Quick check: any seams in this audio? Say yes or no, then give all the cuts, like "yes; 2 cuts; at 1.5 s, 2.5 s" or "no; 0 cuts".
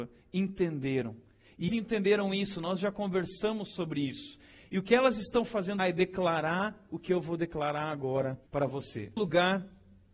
yes; 4 cuts; at 1.7 s, 5.8 s, 8.5 s, 9.2 s